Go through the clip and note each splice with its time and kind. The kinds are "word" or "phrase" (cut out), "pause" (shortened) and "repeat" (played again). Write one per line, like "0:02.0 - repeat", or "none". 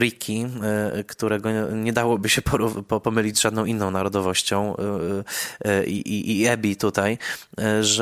none